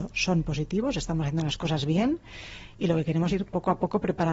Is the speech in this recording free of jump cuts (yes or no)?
no